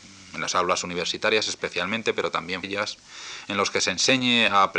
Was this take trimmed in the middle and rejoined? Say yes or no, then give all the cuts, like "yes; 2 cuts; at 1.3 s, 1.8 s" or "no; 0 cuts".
yes; 1 cut; at 2.6 s